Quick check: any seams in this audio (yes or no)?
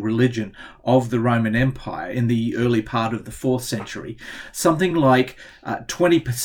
no